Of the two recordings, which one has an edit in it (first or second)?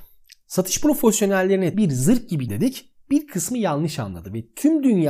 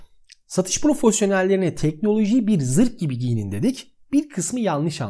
first